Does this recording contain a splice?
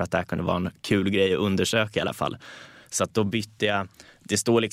no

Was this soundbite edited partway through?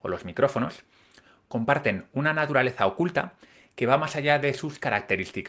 no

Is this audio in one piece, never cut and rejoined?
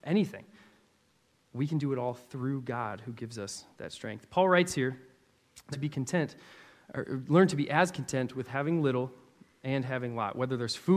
no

